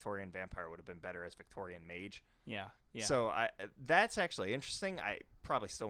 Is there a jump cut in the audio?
yes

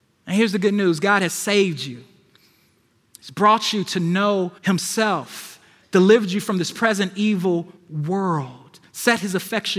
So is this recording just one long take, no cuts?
no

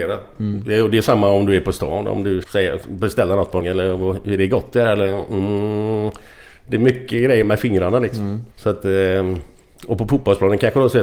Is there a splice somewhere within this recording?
yes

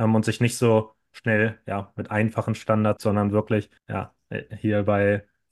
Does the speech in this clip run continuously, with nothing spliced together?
no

